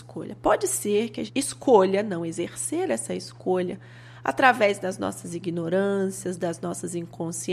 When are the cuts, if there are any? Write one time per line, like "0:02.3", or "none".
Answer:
0:01.3